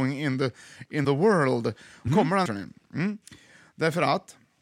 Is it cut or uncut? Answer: cut